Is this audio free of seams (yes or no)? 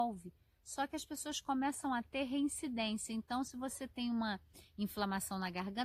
yes